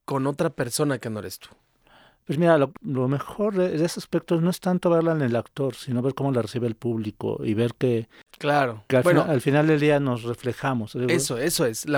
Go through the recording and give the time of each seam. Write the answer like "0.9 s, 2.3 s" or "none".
none